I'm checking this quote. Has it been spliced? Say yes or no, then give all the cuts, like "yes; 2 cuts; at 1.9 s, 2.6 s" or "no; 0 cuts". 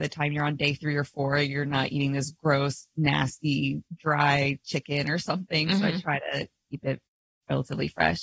yes; 2 cuts; at 3.9 s, 7.2 s